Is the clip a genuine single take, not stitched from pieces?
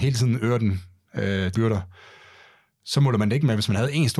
no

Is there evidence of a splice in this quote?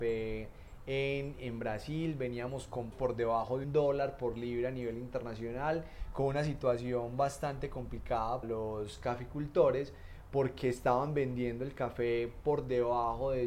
yes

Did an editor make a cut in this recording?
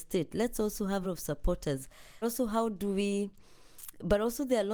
yes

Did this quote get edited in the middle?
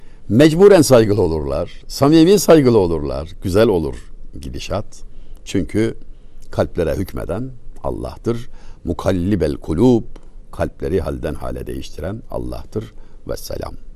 no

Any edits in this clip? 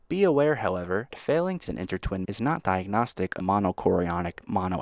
yes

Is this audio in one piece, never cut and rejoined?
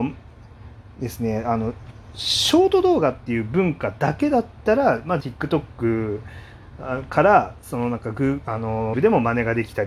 no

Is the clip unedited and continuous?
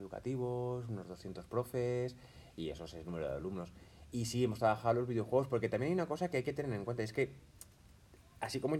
yes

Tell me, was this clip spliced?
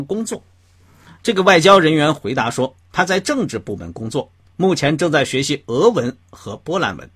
yes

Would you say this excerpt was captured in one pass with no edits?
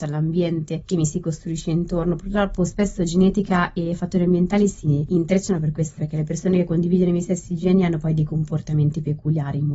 no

